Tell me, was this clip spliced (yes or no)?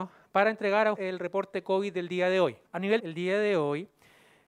yes